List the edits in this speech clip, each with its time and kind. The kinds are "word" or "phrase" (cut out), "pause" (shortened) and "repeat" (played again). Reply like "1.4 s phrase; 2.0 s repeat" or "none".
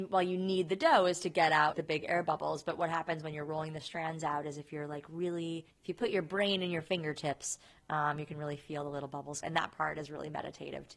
1.7 s word; 5.7 s pause; 9.4 s phrase